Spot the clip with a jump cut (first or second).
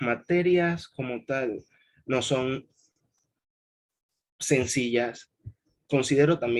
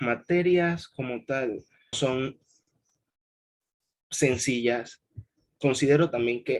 second